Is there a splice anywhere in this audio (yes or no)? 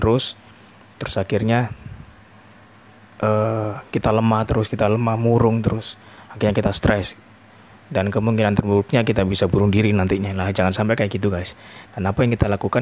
no